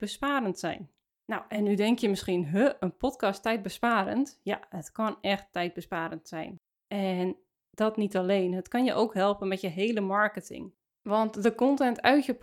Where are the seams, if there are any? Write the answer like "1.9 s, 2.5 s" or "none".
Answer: none

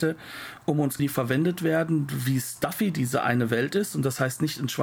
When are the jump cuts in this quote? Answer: 1.0 s

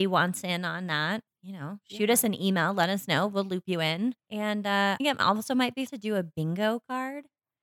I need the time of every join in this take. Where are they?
1.3 s, 4.2 s, 5.0 s, 5.9 s

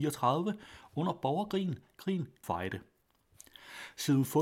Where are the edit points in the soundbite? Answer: 2.4 s

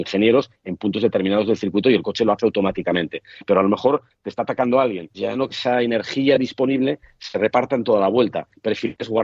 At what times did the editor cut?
5.1 s, 5.5 s

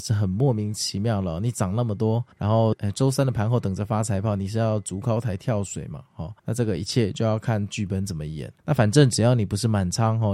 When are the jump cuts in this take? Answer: 2.3 s, 6.4 s, 8.6 s

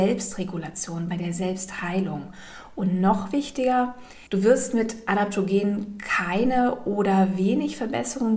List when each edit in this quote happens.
4.3 s

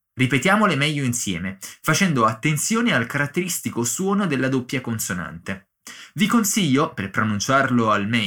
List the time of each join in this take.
none

